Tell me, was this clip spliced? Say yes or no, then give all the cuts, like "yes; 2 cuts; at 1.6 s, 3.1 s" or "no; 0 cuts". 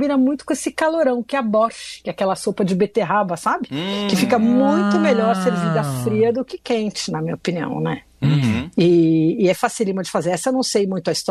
no; 0 cuts